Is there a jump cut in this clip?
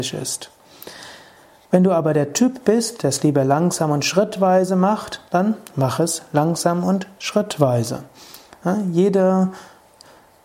no; 0 cuts

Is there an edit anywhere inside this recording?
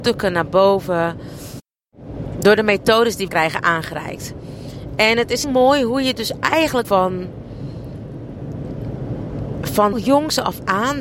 yes; 4 cuts; at 3.3 s, 5.4 s, 6.8 s, 9.9 s

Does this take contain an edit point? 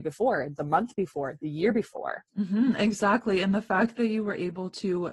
yes; 1 cut; at 2.3 s

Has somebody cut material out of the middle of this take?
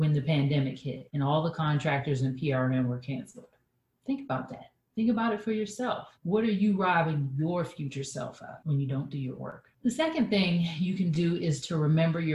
yes; 1 cut; at 6.2 s

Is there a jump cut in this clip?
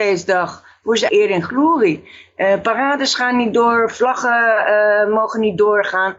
yes; 1 cut; at 1.1 s

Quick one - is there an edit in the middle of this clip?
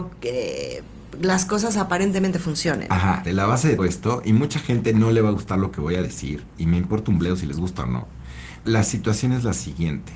yes; 3 cuts; at 3.3 s, 3.8 s, 8.7 s

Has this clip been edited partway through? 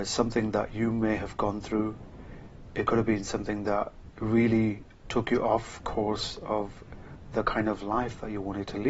no; 0 cuts

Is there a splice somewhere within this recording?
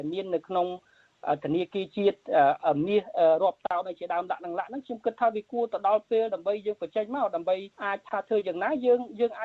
yes; 1 cut; at 7.7 s

